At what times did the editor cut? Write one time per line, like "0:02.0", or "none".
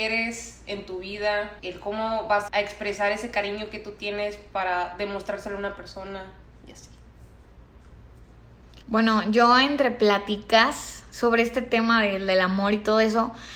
0:01.6
0:02.5
0:06.4
0:08.8